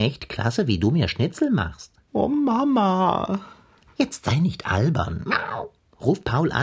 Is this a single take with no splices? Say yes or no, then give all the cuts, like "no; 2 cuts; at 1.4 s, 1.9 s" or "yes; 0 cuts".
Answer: yes; 0 cuts